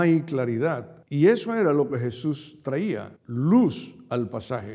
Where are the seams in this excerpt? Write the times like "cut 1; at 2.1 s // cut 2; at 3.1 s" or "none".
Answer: cut 1; at 1.0 s // cut 2; at 3.2 s